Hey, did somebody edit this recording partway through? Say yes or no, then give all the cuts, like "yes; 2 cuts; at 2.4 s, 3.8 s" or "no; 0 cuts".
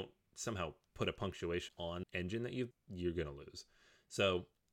yes; 3 cuts; at 1.7 s, 2.0 s, 2.7 s